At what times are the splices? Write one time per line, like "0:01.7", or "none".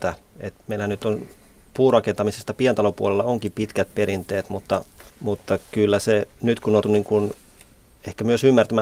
0:05.1
0:06.3
0:06.8